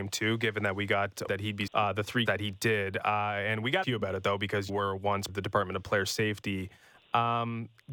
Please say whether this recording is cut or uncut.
cut